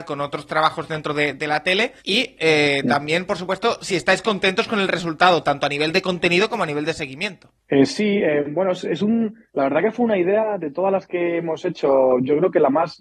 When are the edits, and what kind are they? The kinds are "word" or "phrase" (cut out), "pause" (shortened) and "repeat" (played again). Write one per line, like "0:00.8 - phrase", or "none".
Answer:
0:02.0 - pause
0:09.5 - pause